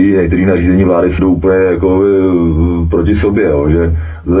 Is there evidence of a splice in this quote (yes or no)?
yes